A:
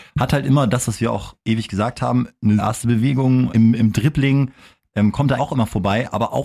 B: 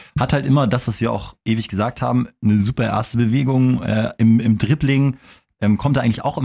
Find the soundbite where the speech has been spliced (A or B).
A